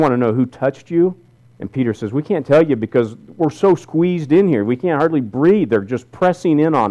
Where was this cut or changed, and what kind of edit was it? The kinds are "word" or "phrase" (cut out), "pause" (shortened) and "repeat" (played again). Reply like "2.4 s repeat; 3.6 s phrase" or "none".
1.4 s pause